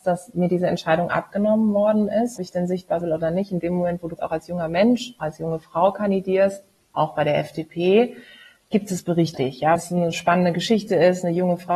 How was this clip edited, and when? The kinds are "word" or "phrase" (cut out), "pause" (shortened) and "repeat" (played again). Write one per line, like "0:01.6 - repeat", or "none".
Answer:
0:02.4 - word
0:03.0 - word
0:04.2 - word
0:05.2 - word
0:09.3 - word
0:09.8 - word